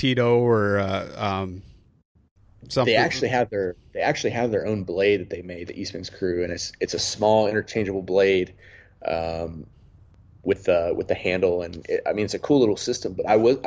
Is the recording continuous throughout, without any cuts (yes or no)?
yes